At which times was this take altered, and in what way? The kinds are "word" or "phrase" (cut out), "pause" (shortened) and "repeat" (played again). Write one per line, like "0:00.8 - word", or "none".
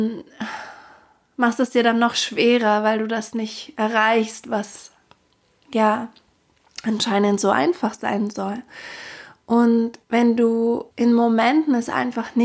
0:10.0 - pause
0:10.9 - pause